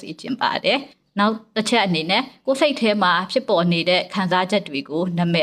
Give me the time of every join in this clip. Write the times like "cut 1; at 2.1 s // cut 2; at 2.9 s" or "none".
cut 1; at 0.9 s